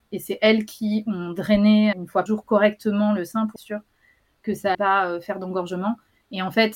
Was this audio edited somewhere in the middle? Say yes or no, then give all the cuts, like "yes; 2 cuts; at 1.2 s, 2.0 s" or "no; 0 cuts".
yes; 4 cuts; at 1.9 s, 2.3 s, 3.6 s, 4.7 s